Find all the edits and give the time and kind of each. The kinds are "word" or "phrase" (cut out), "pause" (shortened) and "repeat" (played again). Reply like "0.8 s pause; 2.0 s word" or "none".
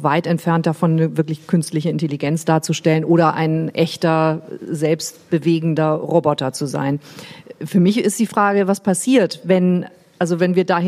none